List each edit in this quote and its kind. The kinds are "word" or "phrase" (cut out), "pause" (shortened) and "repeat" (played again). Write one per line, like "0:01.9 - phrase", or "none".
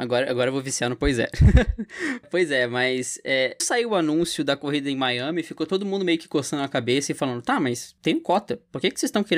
0:02.2 - word
0:03.6 - word